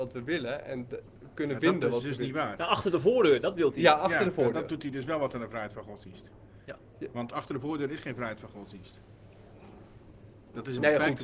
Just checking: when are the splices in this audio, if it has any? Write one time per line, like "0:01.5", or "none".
0:06.6